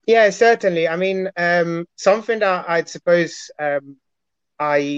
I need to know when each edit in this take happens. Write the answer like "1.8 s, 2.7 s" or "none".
none